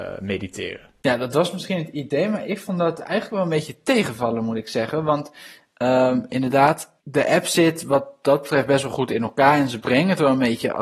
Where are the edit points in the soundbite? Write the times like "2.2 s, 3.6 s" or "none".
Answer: 1.0 s, 7.0 s